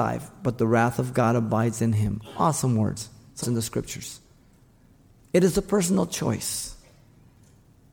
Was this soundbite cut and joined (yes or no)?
yes